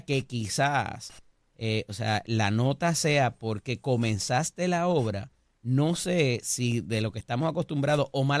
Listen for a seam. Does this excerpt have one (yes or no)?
no